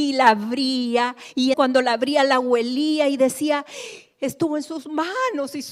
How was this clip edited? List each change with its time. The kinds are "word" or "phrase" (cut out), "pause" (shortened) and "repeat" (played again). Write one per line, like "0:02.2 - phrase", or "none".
0:01.5 - word